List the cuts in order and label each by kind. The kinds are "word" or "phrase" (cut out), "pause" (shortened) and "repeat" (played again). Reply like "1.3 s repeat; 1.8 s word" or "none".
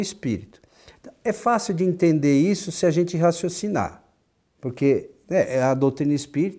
none